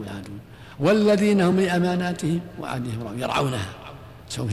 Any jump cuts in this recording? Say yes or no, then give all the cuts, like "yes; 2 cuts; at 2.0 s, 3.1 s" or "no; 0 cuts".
no; 0 cuts